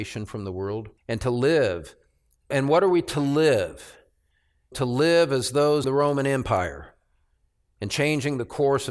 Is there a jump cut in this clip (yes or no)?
yes